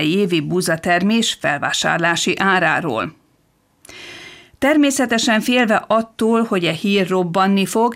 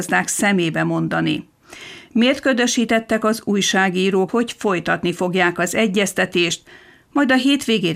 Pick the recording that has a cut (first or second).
second